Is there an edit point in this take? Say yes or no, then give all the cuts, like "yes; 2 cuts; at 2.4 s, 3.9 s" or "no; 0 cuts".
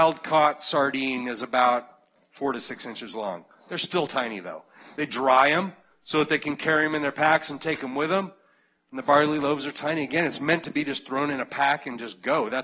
no; 0 cuts